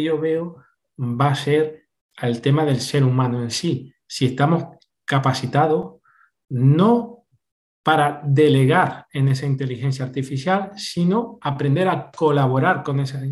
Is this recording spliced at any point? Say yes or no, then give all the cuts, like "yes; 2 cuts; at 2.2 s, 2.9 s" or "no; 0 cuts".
no; 0 cuts